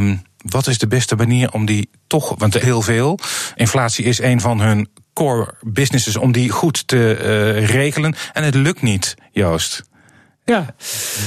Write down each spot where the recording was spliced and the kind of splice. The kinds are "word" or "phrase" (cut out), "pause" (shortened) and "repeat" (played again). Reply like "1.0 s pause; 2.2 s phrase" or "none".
2.6 s phrase; 3.5 s word